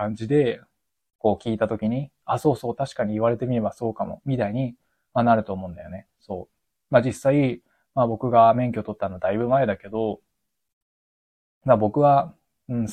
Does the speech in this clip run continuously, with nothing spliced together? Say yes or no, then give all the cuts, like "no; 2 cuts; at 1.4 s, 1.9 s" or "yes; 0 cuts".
yes; 0 cuts